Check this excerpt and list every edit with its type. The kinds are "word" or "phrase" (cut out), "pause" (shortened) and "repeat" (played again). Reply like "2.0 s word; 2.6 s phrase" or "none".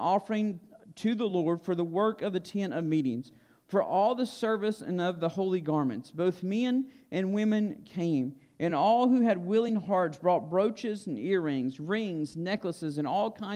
none